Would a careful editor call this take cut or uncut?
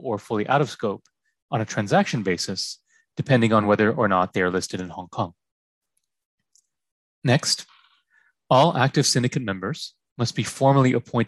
uncut